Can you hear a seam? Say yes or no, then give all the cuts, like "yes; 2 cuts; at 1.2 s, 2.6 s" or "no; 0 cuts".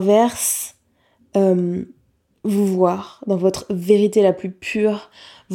no; 0 cuts